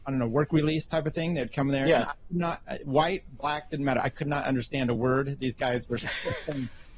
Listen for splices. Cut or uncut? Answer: uncut